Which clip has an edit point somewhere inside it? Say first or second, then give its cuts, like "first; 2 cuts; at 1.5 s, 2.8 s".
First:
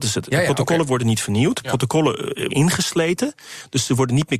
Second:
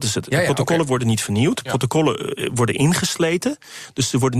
first; 1 cut; at 2.5 s